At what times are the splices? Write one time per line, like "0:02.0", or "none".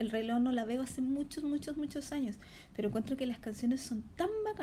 none